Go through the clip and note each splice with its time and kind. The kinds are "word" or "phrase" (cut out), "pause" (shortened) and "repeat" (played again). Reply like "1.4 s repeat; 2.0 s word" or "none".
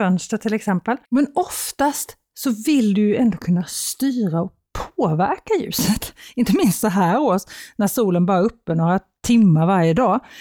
1.0 s pause